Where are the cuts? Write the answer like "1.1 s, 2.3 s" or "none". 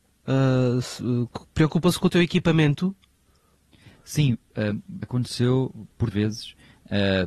5.0 s, 6.1 s